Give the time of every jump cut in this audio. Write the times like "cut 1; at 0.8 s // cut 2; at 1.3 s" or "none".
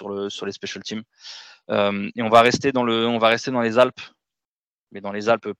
none